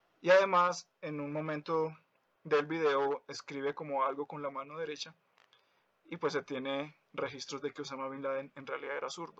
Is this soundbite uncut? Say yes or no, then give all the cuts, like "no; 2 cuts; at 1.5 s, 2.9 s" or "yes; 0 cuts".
yes; 0 cuts